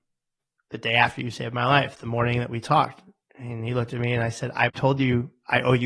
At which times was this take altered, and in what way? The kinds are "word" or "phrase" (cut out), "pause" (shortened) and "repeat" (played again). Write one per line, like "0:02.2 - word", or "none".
none